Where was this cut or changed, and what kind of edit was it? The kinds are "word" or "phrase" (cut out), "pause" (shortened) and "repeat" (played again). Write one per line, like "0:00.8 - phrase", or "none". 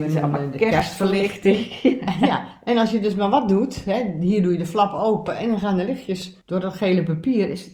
0:06.4 - pause